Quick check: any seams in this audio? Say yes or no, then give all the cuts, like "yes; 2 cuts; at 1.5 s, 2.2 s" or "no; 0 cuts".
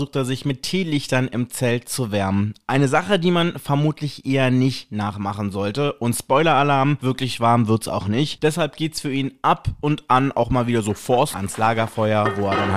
yes; 1 cut; at 11.3 s